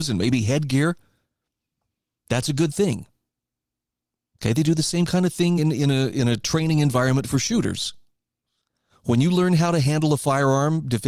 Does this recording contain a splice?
no; 0 cuts

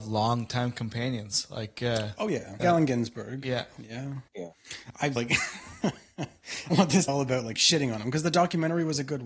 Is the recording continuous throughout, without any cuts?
no; 5 cuts; at 2.6 s, 4.3 s, 5.2 s, 6.7 s, 7.1 s

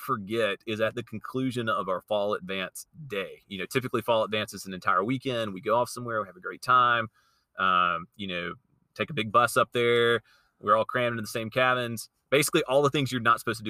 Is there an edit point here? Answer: no; 0 cuts

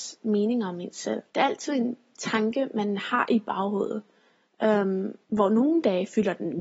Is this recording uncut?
no; 2 cuts; at 1.3 s, 5.2 s

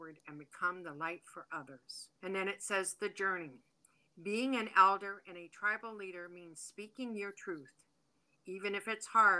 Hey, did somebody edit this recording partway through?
yes; 1 cut; at 2.2 s

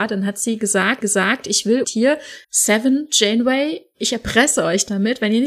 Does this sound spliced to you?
yes; 3 cuts; at 1.0 s, 1.8 s, 2.4 s

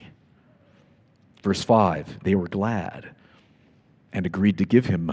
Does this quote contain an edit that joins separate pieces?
no; 0 cuts

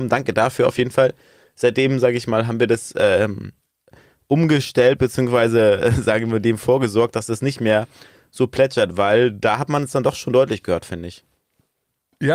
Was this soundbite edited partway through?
no; 0 cuts

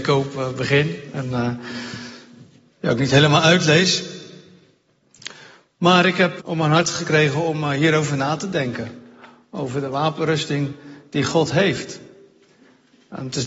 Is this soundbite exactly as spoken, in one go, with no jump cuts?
no; 1 cut; at 6.4 s

